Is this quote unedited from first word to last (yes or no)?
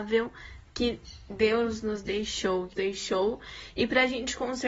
no